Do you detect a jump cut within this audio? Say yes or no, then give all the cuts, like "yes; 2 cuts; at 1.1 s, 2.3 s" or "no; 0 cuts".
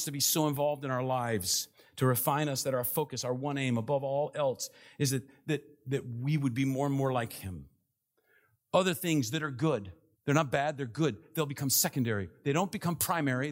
yes; 1 cut; at 10.1 s